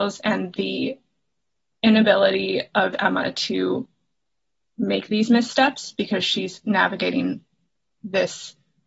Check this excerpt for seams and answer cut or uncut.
uncut